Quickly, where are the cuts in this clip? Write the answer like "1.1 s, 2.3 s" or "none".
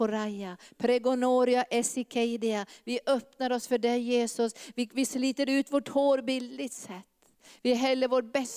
none